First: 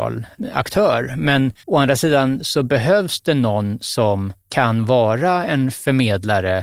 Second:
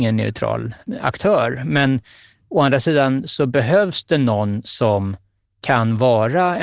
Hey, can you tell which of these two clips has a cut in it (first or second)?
first